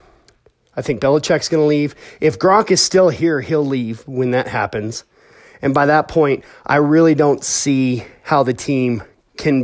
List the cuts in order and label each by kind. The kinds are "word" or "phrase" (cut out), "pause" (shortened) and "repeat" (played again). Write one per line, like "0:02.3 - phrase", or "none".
none